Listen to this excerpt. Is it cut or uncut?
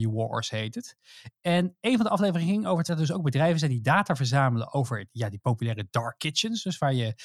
cut